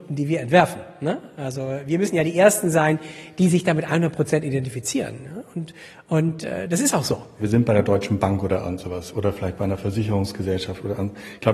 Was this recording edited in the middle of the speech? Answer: no; 0 cuts

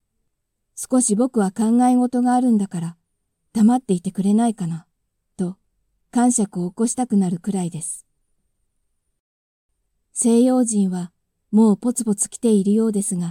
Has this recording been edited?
no; 0 cuts

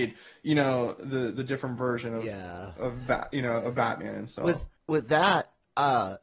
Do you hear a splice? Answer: yes; 1 cut; at 4.8 s

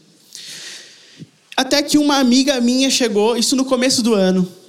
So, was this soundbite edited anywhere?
no; 0 cuts

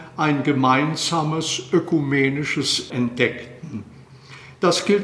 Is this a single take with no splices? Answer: no; 1 cut; at 2.9 s

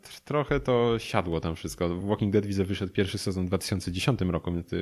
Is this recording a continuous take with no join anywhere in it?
yes; 0 cuts

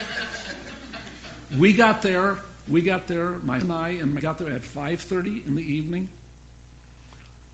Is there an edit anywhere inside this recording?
yes; 2 cuts; at 3.6 s, 4.2 s

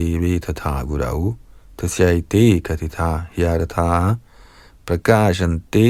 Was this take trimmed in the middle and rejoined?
no; 0 cuts

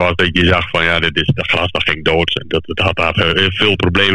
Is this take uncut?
yes; 0 cuts

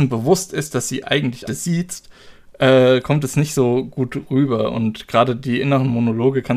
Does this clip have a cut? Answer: yes; 1 cut; at 1.5 s

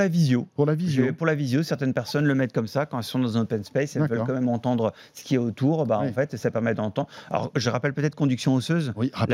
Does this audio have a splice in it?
no; 0 cuts

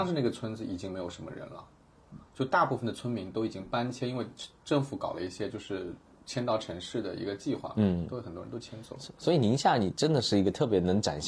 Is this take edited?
no; 0 cuts

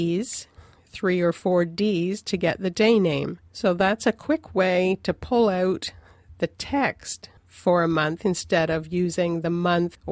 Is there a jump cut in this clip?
yes; 2 cuts; at 3.5 s, 7.4 s

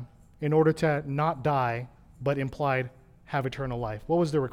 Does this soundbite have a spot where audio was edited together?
no; 0 cuts

